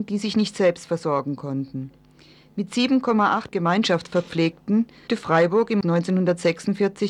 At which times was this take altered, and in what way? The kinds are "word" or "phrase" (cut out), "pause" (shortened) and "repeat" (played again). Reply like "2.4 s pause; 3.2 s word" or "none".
3.5 s word; 5.1 s word; 5.8 s word